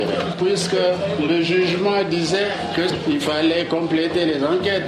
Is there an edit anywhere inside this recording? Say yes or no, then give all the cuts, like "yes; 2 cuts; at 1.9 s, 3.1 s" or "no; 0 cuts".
no; 0 cuts